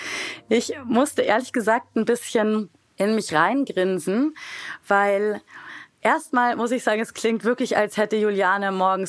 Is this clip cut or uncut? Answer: uncut